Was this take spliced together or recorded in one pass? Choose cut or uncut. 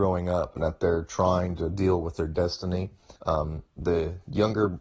cut